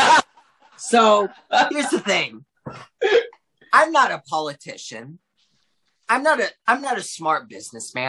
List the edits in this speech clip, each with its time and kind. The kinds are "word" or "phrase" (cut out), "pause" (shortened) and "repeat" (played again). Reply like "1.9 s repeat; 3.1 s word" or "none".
none